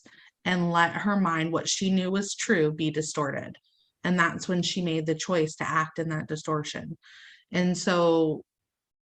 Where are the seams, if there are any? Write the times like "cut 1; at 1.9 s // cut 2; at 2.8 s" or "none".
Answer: none